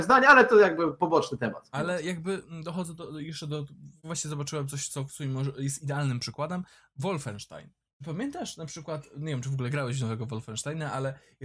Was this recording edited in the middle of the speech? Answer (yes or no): no